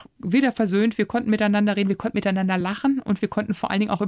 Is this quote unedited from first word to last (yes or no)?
yes